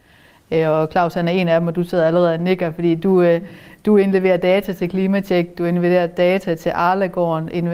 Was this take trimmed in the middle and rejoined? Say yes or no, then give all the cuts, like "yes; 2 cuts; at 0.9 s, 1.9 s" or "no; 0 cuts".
no; 0 cuts